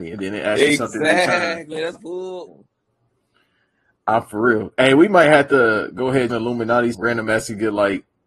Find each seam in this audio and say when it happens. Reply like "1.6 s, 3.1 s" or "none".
1.9 s, 2.5 s, 6.3 s, 6.9 s